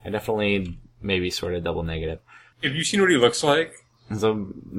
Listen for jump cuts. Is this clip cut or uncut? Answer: uncut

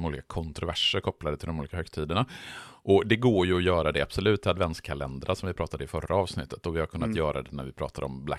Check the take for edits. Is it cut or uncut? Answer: uncut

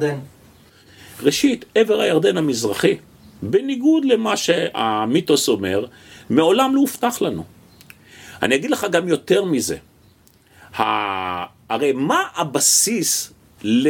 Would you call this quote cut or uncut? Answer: uncut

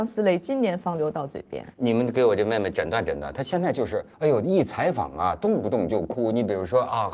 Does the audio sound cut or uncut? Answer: cut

